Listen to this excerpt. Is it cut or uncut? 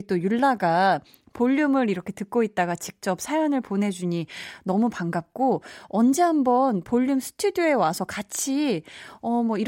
uncut